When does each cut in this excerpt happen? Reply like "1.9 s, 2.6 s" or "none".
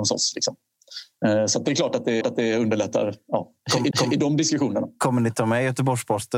2.2 s, 3.9 s